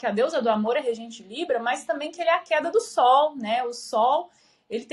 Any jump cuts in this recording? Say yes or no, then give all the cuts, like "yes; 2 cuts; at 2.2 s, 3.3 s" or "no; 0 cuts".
no; 0 cuts